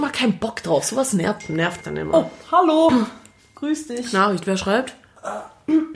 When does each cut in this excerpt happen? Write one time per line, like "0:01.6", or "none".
0:01.8